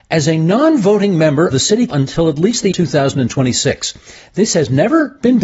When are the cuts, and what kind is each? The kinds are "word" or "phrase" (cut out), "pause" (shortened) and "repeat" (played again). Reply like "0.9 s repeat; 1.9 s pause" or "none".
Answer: 1.5 s word; 1.9 s word; 2.7 s word